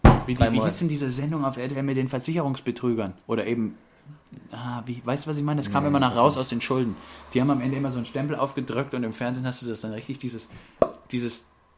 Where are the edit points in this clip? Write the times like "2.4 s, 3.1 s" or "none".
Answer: 3.2 s